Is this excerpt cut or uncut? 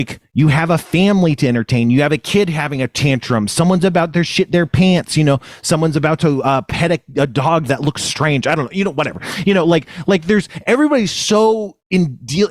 uncut